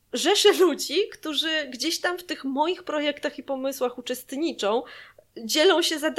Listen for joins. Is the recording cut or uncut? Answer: uncut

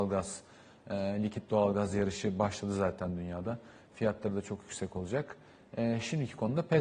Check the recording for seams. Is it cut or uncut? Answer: uncut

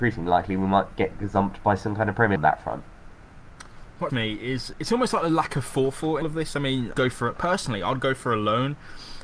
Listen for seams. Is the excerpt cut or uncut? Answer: cut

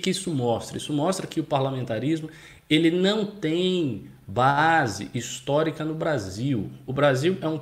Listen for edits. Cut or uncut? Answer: uncut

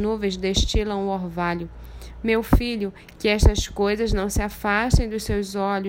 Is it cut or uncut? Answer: uncut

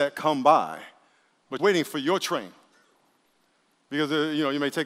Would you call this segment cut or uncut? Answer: cut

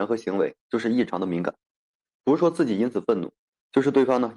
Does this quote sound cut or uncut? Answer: uncut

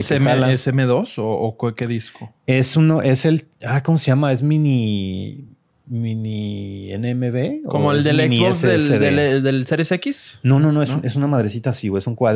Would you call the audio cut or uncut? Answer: uncut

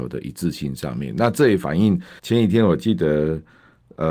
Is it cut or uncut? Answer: cut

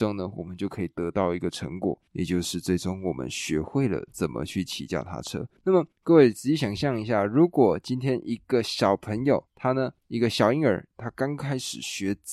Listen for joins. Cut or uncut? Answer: cut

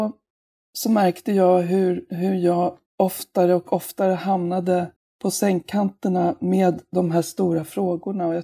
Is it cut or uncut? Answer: cut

